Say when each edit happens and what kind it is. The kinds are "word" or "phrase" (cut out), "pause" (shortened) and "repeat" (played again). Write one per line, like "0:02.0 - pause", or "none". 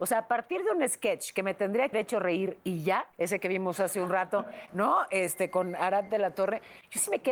0:01.9 - word
0:03.1 - pause